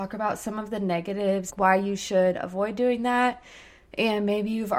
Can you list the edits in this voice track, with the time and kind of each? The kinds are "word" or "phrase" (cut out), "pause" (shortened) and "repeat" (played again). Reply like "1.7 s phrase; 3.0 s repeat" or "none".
1.5 s phrase